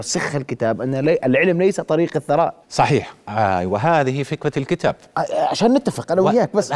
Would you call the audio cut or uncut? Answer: cut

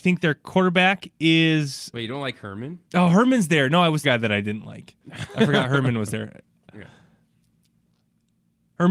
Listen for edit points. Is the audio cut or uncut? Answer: cut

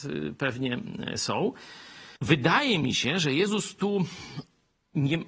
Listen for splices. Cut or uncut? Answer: cut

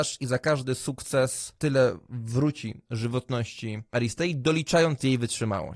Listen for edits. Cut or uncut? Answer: uncut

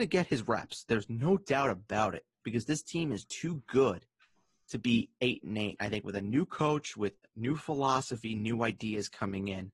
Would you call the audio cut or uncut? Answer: cut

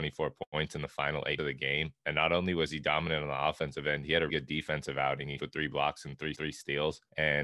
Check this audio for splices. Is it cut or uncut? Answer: cut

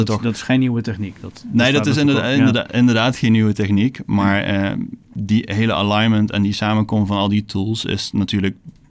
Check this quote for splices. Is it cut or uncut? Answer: uncut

